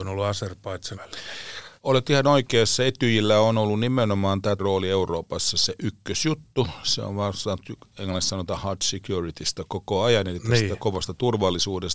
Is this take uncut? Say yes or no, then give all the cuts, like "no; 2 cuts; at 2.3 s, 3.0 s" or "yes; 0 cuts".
no; 3 cuts; at 0.9 s, 1.8 s, 4.6 s